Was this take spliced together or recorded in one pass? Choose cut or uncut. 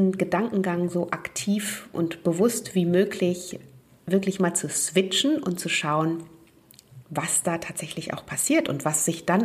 uncut